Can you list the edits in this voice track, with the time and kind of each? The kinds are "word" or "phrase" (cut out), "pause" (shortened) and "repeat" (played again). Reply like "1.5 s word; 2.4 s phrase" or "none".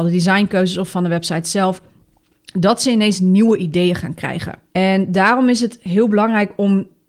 4.7 s pause